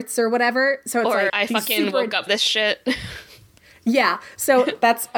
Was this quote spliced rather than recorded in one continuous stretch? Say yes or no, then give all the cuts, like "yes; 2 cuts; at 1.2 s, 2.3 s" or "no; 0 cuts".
yes; 2 cuts; at 1.3 s, 2.3 s